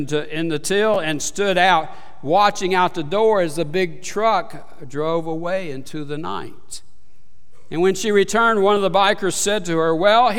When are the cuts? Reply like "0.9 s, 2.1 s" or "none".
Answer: none